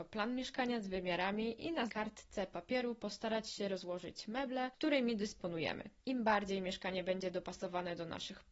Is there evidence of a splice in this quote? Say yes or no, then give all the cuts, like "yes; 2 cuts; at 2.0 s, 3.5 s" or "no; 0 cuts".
yes; 1 cut; at 1.9 s